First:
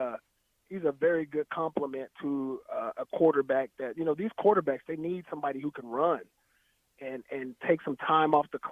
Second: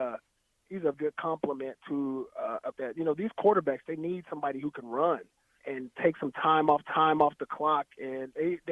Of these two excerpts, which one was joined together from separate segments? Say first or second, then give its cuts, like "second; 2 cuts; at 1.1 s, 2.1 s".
second; 4 cuts; at 0.9 s, 2.7 s, 5.6 s, 6.8 s